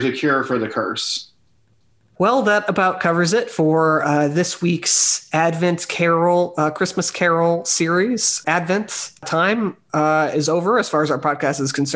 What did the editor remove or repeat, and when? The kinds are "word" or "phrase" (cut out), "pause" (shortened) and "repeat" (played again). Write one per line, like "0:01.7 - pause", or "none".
none